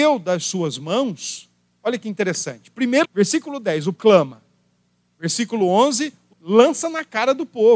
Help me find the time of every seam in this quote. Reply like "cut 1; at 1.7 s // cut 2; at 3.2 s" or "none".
cut 1; at 3.0 s // cut 2; at 4.0 s // cut 3; at 6.3 s